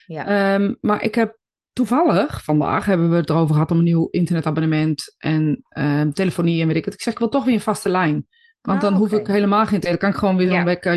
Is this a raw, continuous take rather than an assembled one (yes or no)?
yes